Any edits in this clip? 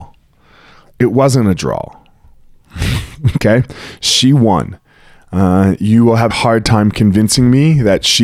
yes; 1 cut; at 6.3 s

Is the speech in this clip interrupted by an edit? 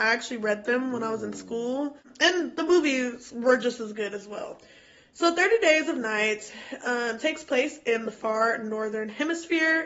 no; 0 cuts

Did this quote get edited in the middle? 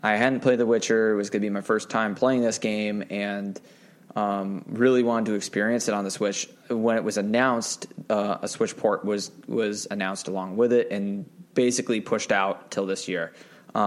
no; 0 cuts

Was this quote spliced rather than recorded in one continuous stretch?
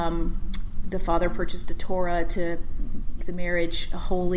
yes; 1 cut; at 3.2 s

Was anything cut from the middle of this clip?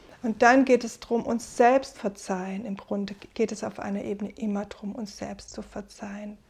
yes; 2 cuts; at 1.9 s, 3.3 s

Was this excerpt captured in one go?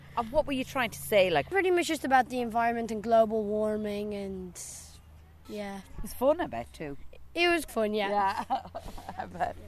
no; 1 cut; at 7.7 s

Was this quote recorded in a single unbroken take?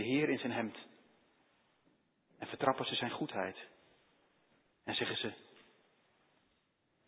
yes; 0 cuts

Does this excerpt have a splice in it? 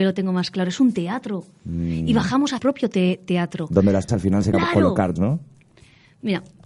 yes; 4 cuts; at 2.6 s, 4.1 s, 4.5 s, 5.2 s

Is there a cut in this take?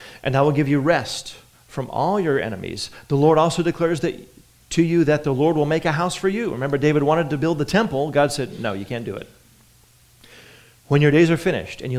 no; 0 cuts

